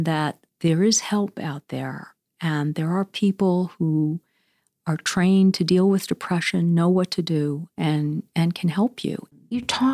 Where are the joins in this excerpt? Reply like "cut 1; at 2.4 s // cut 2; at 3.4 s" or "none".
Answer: none